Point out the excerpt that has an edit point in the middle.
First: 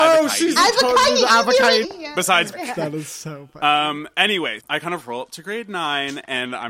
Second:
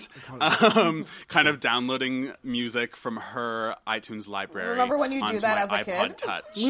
first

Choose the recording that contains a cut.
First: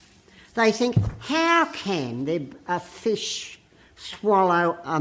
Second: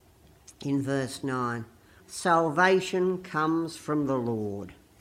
second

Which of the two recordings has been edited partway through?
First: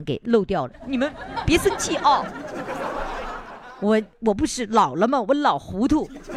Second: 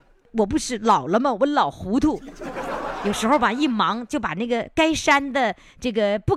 first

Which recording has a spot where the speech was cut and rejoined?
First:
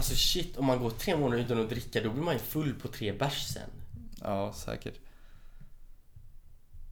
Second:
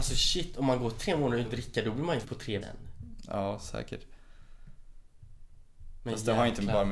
second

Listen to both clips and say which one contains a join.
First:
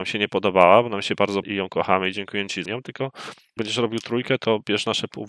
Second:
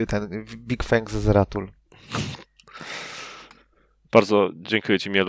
first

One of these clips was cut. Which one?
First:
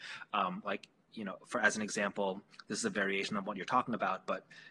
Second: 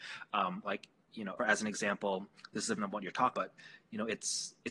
second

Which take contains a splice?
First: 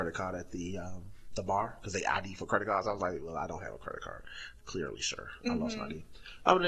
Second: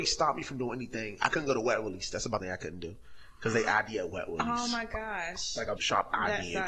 second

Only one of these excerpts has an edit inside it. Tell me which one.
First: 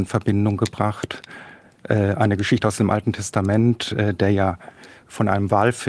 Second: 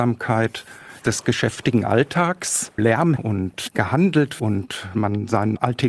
second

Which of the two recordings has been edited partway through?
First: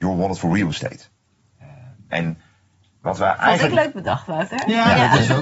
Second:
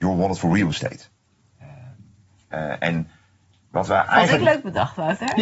first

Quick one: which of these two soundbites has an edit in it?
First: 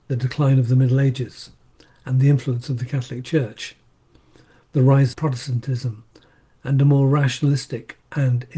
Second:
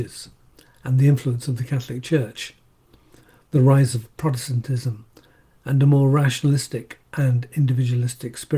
first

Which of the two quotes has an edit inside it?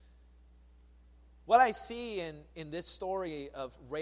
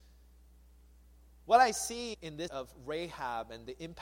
second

